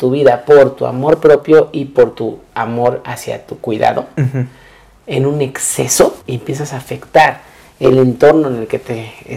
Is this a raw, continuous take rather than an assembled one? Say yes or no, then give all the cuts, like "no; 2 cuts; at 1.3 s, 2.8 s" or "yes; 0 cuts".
no; 1 cut; at 6.2 s